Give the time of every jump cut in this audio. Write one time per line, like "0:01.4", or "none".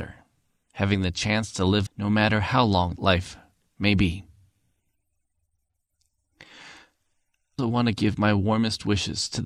0:01.9
0:03.0
0:07.6